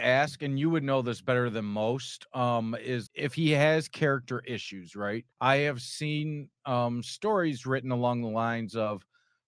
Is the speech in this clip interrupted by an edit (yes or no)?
yes